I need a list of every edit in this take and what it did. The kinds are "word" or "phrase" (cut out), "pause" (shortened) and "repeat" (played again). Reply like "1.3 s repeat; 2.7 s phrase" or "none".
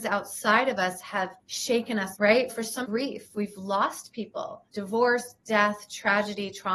1.4 s pause; 2.1 s word; 2.5 s word; 2.8 s phrase; 4.7 s pause